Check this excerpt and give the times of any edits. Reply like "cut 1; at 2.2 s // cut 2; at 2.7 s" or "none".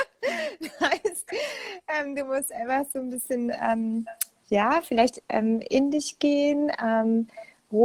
none